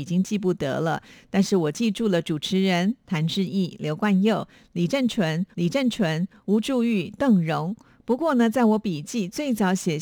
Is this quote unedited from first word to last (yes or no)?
no